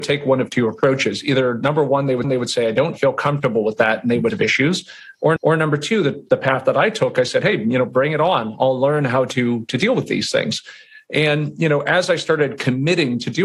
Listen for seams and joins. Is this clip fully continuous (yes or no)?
no